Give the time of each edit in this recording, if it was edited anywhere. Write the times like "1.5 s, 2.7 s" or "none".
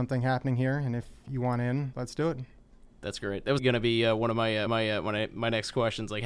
1.9 s, 3.6 s, 4.7 s